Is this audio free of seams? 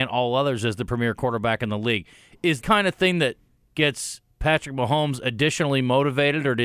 no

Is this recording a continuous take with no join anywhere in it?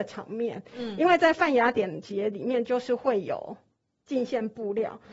yes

